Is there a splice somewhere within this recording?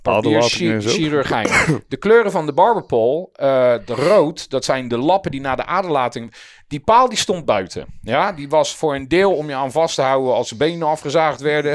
no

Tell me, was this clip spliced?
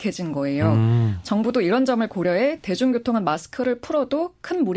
no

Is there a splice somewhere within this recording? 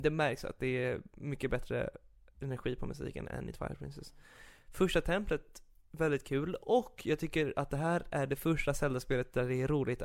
no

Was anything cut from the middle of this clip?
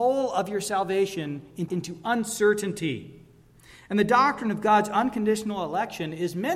yes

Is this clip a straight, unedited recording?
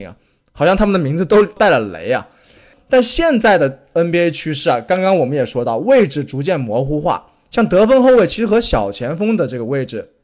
yes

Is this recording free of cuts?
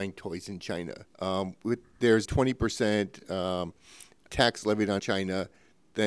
no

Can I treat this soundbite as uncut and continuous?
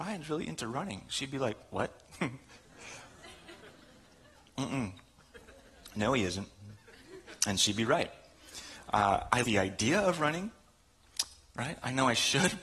no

